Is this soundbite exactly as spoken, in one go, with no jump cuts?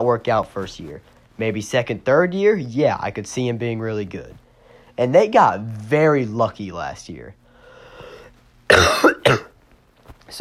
yes; 0 cuts

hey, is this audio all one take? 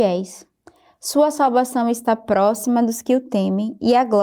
yes; 0 cuts

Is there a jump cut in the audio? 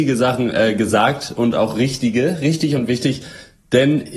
no; 0 cuts

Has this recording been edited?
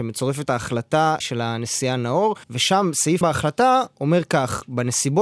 yes; 3 cuts; at 1.2 s, 2.4 s, 3.2 s

